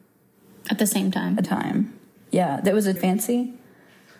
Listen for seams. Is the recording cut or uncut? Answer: cut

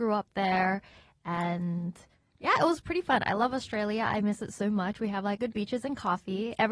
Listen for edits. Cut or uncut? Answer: cut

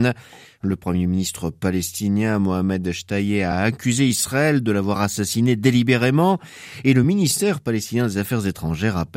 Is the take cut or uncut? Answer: uncut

